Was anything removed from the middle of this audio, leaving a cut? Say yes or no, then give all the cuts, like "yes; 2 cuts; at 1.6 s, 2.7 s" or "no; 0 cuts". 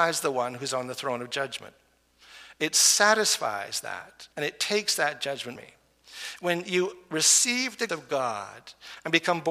yes; 3 cuts; at 4.3 s, 5.6 s, 7.9 s